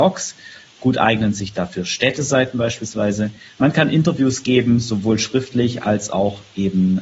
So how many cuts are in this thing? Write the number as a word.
zero